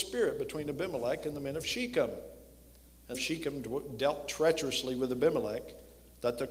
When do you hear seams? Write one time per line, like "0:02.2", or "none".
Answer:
0:03.1